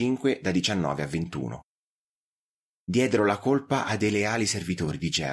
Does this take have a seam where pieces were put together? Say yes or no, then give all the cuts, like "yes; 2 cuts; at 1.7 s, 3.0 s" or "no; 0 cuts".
no; 0 cuts